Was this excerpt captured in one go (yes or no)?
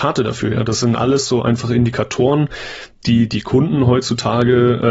yes